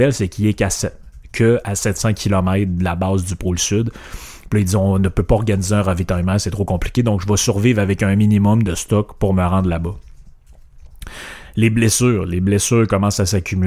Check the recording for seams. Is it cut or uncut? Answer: uncut